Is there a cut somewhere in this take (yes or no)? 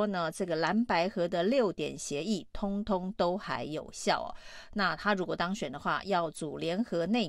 no